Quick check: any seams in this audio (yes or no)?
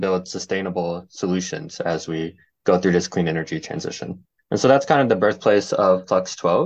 no